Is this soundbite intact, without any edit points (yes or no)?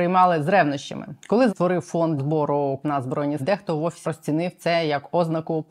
no